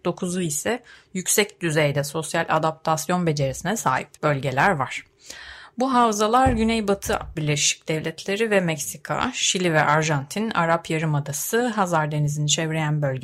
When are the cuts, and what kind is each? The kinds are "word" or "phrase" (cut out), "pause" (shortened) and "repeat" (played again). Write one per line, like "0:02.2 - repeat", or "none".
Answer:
0:04.1 - pause
0:07.4 - word